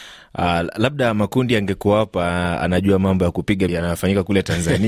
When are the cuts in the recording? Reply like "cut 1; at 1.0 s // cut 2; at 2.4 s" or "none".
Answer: cut 1; at 3.7 s